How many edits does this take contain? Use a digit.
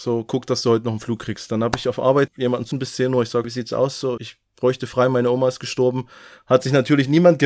4